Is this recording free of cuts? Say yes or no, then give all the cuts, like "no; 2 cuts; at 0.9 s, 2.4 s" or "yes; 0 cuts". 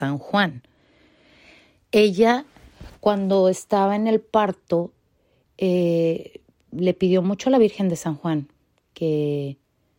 yes; 0 cuts